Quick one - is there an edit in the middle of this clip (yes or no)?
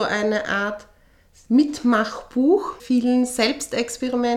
yes